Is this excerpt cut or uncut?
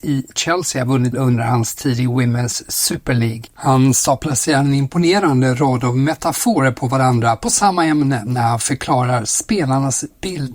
cut